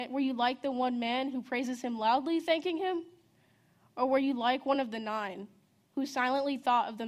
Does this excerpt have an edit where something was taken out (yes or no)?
no